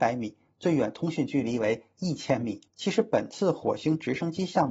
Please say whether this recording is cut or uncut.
cut